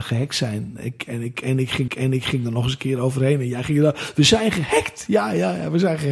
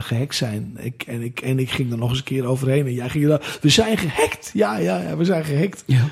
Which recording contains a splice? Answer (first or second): first